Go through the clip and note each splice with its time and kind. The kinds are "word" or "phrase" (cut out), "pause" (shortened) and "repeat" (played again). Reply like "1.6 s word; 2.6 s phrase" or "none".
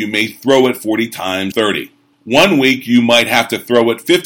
1.5 s phrase; 2.1 s pause